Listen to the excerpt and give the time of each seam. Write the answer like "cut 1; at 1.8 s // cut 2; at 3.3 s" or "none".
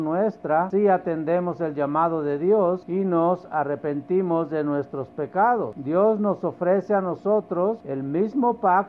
none